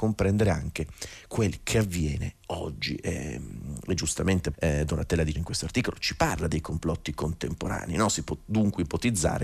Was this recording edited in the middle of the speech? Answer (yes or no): yes